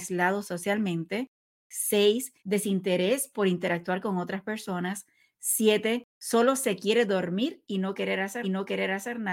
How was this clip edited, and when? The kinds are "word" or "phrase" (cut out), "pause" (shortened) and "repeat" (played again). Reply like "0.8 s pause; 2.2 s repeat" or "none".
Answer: 2.4 s pause; 6.1 s pause; 8.4 s repeat